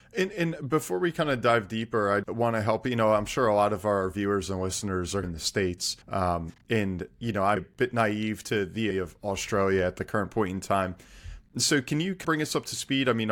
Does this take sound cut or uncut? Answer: cut